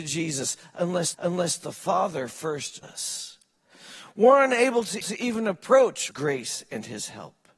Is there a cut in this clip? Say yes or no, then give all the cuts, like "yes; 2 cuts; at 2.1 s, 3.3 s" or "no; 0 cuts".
yes; 4 cuts; at 1.1 s, 2.8 s, 5.0 s, 6.1 s